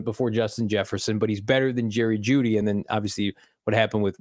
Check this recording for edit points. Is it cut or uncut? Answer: uncut